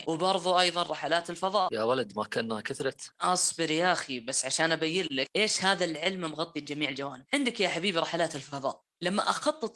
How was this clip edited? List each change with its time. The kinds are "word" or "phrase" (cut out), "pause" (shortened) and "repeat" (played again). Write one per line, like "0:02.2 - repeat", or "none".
none